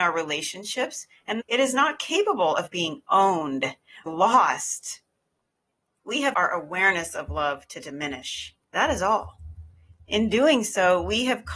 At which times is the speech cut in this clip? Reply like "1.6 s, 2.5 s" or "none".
1.4 s, 4.1 s, 6.3 s, 8.6 s